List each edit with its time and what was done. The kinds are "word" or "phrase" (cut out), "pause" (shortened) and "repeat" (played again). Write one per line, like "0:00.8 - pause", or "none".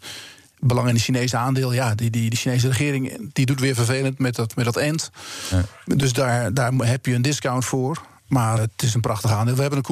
0:08.6 - word